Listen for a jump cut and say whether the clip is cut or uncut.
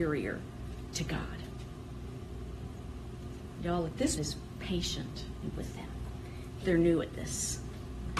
cut